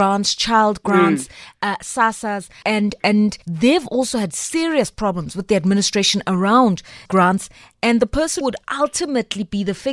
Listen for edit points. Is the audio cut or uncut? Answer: cut